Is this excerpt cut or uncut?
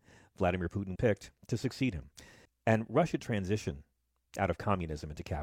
cut